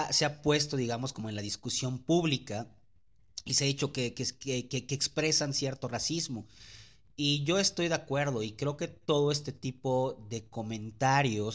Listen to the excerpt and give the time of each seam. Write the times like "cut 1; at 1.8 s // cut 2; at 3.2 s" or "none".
none